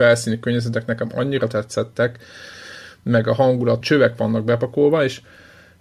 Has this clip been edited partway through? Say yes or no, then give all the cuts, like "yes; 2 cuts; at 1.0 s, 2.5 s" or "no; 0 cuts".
yes; 1 cut; at 3.8 s